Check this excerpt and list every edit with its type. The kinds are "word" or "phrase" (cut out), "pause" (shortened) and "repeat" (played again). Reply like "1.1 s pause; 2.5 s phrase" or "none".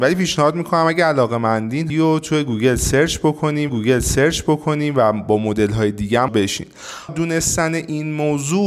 1.9 s phrase; 3.7 s repeat; 6.3 s word; 7.1 s word